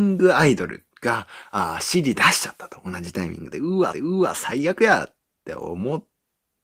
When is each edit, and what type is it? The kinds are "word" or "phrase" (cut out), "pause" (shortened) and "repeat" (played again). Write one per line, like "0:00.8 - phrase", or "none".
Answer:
0:00.9 - pause
0:03.9 - repeat